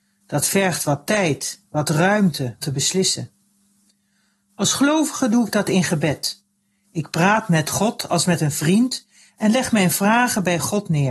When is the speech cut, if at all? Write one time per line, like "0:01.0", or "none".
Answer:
0:02.6